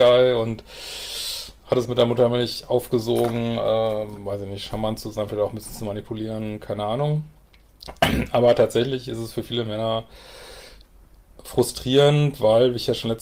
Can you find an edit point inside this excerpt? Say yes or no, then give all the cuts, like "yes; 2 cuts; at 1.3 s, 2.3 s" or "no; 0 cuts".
no; 0 cuts